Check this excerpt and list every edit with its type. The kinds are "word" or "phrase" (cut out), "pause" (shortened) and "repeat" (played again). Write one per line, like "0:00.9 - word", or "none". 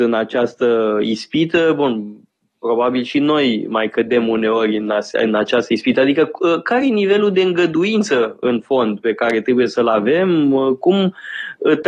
none